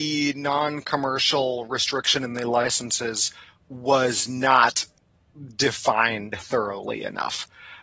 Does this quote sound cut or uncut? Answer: uncut